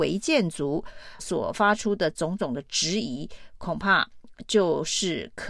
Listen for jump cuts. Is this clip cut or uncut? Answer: cut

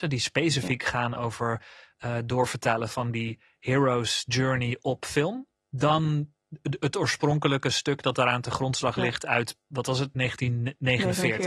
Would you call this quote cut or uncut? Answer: uncut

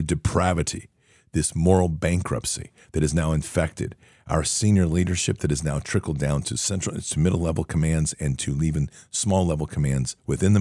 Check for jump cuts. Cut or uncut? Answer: uncut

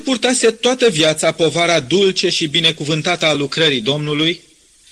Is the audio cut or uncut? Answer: uncut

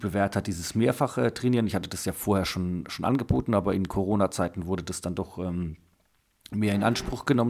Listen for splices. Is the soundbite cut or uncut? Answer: uncut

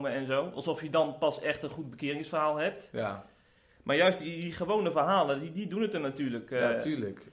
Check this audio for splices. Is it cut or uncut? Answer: uncut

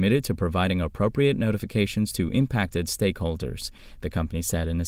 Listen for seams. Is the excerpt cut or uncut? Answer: uncut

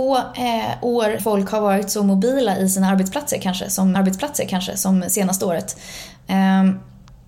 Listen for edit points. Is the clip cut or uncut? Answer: cut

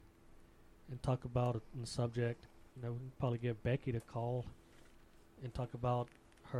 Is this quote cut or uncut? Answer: cut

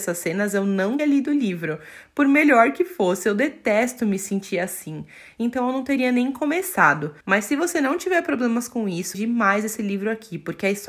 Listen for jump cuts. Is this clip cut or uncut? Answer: cut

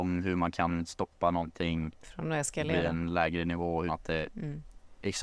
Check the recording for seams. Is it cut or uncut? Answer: cut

